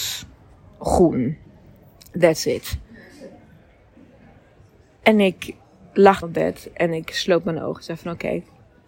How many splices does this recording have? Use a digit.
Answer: 1